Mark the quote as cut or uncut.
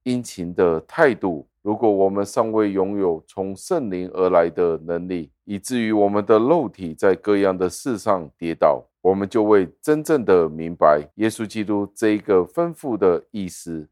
cut